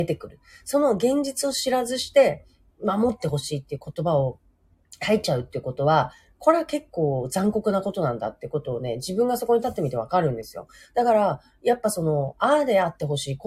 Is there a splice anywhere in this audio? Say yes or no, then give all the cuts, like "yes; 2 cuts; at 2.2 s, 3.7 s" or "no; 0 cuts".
no; 0 cuts